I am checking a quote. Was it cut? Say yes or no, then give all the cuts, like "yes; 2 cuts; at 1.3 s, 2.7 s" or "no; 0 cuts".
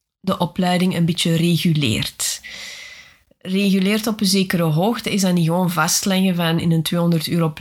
no; 0 cuts